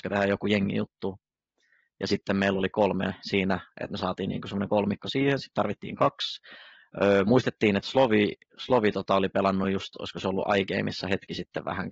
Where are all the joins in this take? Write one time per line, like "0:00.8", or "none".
none